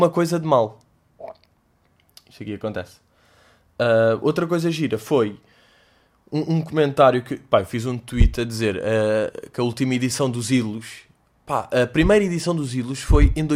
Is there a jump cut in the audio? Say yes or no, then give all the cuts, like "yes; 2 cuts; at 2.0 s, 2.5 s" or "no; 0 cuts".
no; 0 cuts